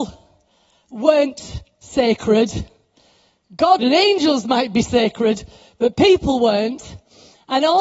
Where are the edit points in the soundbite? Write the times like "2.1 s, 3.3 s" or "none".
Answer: 3.8 s